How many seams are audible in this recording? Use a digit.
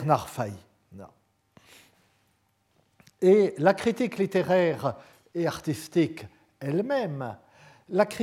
0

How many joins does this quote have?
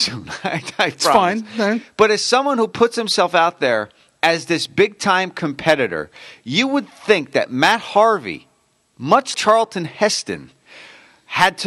1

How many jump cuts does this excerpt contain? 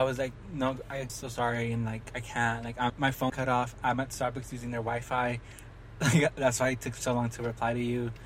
3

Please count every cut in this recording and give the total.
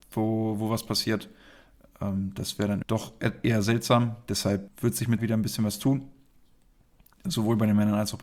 3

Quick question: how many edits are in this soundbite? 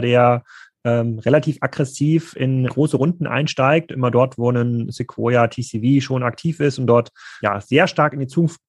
2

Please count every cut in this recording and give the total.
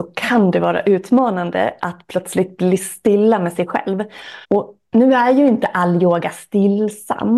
1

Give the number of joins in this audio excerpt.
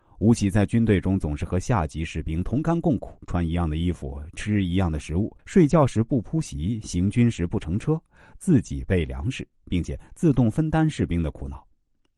2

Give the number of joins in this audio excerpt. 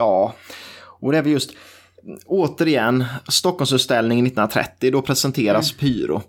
0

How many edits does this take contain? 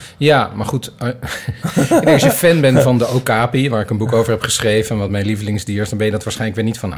0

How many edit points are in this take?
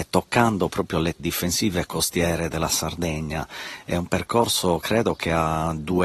1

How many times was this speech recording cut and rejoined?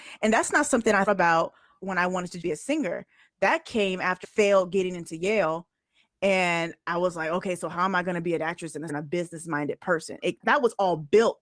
6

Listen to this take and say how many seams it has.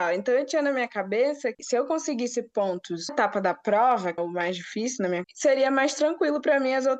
4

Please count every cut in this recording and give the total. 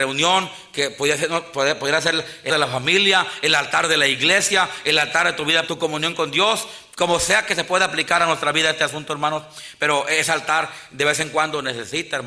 2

